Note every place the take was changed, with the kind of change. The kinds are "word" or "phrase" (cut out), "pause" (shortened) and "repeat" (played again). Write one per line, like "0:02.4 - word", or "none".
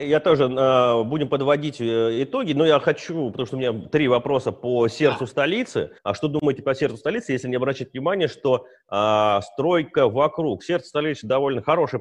0:06.0 - pause